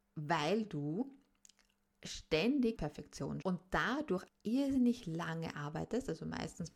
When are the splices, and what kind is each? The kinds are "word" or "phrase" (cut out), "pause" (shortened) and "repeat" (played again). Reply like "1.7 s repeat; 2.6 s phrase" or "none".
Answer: 2.8 s word; 3.4 s phrase; 4.3 s word